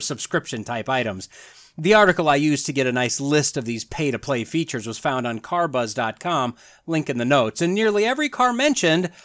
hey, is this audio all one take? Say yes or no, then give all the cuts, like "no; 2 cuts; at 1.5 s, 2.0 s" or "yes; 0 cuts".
yes; 0 cuts